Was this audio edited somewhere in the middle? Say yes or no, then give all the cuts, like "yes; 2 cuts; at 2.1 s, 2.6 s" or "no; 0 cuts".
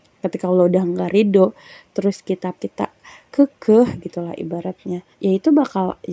yes; 2 cuts; at 2.6 s, 5.1 s